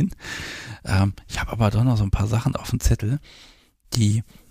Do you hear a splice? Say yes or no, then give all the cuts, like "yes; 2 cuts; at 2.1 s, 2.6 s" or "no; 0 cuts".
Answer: no; 0 cuts